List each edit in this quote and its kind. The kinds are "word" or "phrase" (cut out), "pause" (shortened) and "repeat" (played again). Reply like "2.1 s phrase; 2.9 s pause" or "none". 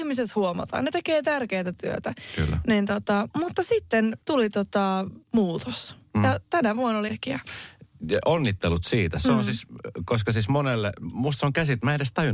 4.2 s pause; 5.2 s pause; 7.1 s phrase